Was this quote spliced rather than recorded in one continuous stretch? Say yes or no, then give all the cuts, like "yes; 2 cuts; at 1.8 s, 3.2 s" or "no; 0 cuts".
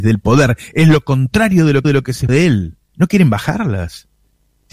yes; 3 cuts; at 1.8 s, 2.3 s, 2.8 s